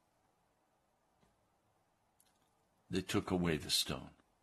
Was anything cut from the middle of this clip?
no; 0 cuts

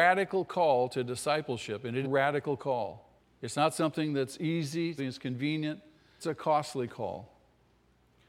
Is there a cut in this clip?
yes; 4 cuts; at 2.0 s, 3.2 s, 5.0 s, 6.2 s

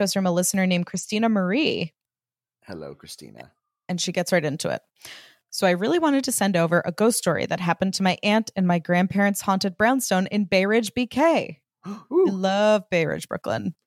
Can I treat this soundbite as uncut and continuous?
yes; 0 cuts

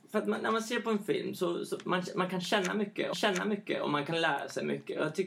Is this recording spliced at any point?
yes; 1 cut; at 3.1 s

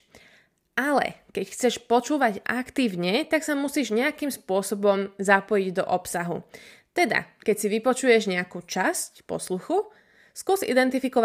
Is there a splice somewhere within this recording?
no; 0 cuts

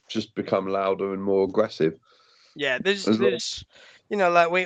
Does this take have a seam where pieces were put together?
no; 0 cuts

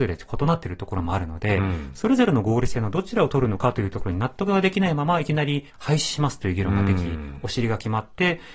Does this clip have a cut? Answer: yes; 1 cut; at 5.7 s

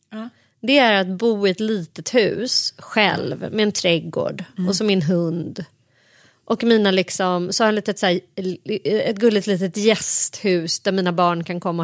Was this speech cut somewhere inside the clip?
no; 0 cuts

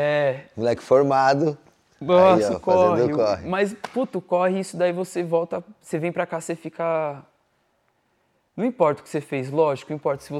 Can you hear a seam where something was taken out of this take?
no; 0 cuts

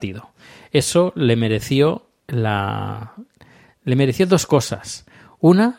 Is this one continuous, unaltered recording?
yes; 0 cuts

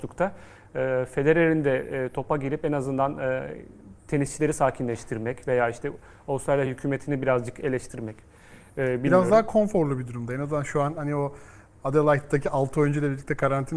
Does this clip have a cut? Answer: no; 0 cuts

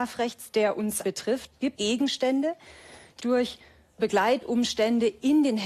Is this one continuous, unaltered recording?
no; 4 cuts; at 1.0 s, 1.8 s, 3.2 s, 4.0 s

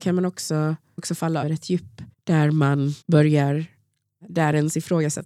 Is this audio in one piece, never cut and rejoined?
no; 4 cuts; at 1.0 s, 1.4 s, 2.1 s, 3.0 s

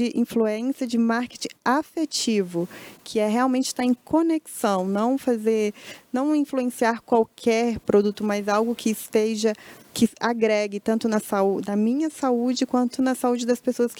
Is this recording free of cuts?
yes; 0 cuts

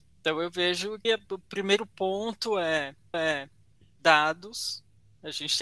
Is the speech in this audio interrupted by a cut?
yes; 2 cuts; at 1.0 s, 3.1 s

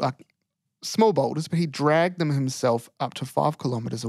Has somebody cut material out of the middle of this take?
no; 0 cuts

